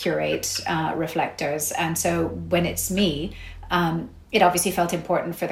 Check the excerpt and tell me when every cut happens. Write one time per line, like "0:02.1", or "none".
none